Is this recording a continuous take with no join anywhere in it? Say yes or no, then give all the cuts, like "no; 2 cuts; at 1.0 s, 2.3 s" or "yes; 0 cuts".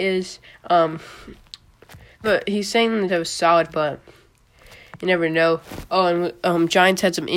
no; 3 cuts; at 2.2 s, 3.1 s, 3.7 s